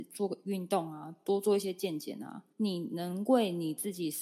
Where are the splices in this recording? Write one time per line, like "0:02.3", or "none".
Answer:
0:02.5